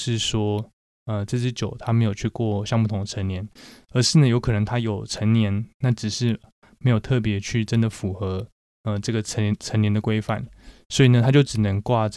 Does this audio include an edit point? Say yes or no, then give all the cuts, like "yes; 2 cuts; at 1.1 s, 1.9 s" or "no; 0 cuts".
no; 0 cuts